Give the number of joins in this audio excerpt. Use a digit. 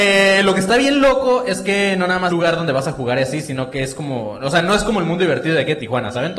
1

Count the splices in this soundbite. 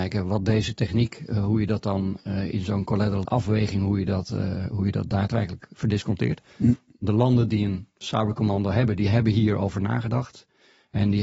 1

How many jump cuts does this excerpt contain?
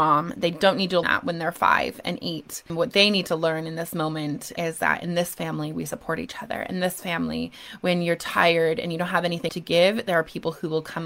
2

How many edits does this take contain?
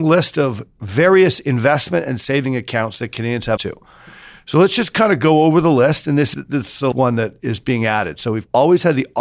3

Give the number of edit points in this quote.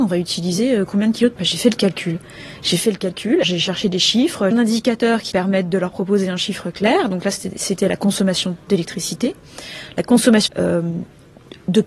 6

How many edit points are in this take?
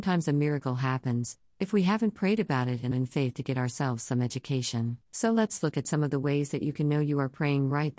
2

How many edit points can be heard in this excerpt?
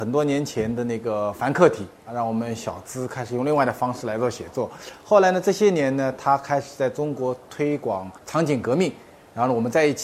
2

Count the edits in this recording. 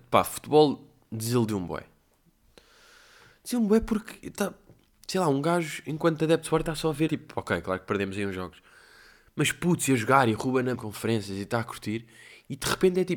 2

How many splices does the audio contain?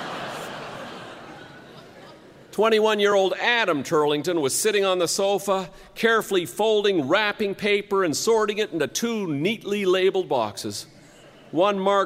0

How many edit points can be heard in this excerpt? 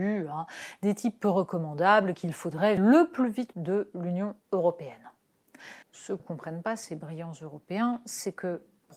4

